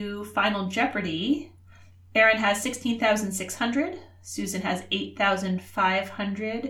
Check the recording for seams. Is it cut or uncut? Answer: uncut